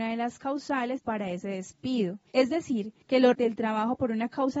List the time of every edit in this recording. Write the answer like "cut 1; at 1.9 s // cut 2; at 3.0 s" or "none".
cut 1; at 1.0 s // cut 2; at 2.3 s // cut 3; at 3.3 s